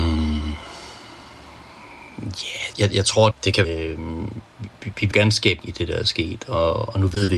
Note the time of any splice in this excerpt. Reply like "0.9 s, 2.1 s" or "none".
2.7 s, 3.3 s, 3.6 s, 5.1 s, 5.6 s